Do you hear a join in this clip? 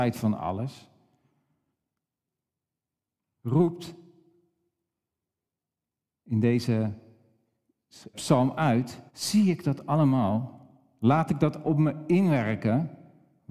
yes; 3 cuts; at 8.1 s, 9.1 s, 11.6 s

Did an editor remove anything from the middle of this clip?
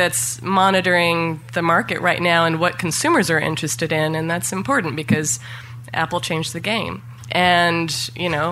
no; 0 cuts

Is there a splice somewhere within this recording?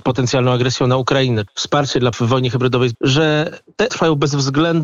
yes; 4 cuts; at 1.5 s, 2.1 s, 2.9 s, 3.9 s

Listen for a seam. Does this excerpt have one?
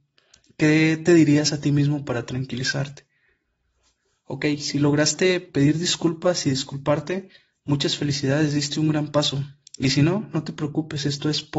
no; 0 cuts

